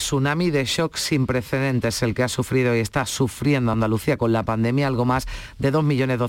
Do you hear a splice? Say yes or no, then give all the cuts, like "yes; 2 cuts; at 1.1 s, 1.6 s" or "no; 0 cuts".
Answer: no; 0 cuts